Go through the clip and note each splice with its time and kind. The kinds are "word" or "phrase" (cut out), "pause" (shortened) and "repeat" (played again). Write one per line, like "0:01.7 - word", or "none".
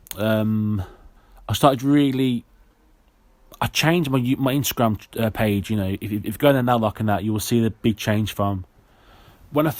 0:01.2 - pause